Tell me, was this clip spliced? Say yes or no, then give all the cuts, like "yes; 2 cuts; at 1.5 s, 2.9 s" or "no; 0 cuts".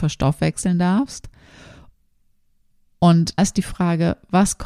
yes; 1 cut; at 3.4 s